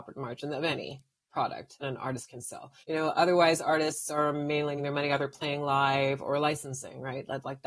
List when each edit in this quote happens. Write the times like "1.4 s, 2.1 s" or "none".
1.8 s, 2.8 s, 4.8 s